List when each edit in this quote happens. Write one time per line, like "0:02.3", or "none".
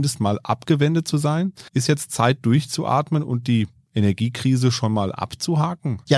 0:01.7